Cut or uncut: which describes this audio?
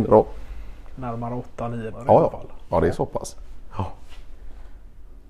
cut